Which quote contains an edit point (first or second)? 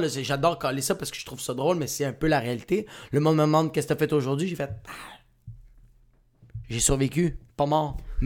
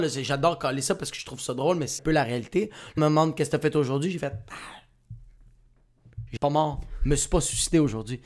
second